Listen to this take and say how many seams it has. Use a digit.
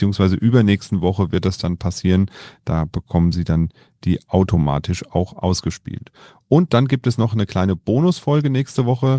0